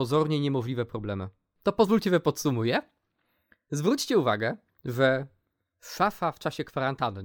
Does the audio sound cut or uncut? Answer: uncut